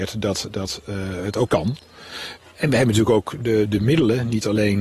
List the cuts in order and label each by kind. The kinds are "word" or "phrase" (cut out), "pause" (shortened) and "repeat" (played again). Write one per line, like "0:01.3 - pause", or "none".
0:01.5 - word
0:03.6 - word